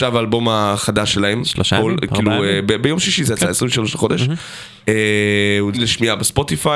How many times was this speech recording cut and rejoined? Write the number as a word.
one